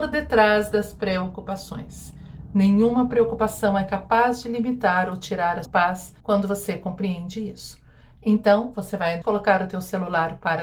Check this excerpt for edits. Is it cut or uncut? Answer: cut